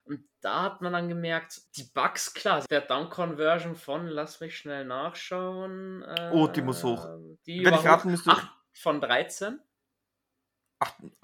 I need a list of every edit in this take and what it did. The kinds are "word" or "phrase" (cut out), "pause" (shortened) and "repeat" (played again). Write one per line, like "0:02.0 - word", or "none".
0:01.7 - pause
0:02.7 - phrase